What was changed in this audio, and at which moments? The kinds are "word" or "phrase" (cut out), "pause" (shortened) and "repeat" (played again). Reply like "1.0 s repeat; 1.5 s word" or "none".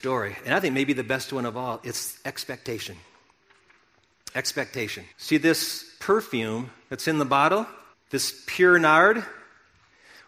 5.1 s pause; 7.9 s pause

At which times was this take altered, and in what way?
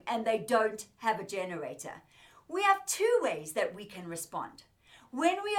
none

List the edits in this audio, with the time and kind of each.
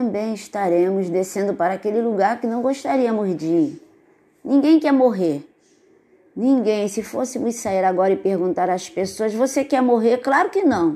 none

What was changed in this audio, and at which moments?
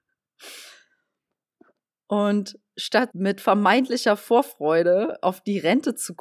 3.1 s word

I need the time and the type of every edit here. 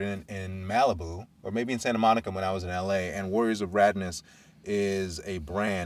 1.3 s pause

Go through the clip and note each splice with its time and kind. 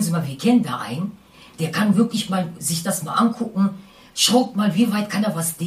none

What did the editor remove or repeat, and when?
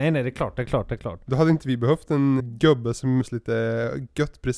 2.4 s word; 3.2 s word

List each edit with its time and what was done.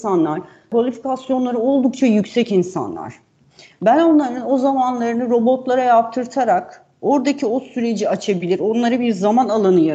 none

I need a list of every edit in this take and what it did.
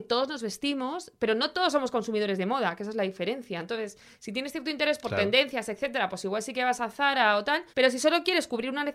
7.7 s pause

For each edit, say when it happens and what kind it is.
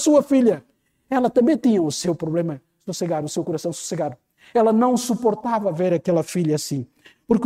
none

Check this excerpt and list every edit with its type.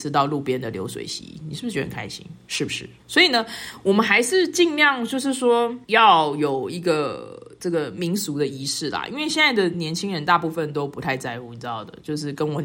3.0 s pause; 5.8 s pause

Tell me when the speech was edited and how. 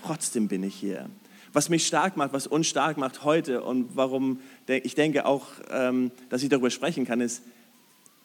none

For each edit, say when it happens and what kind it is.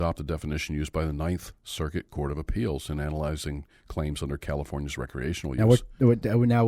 none

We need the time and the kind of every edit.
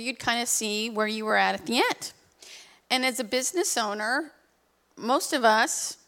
none

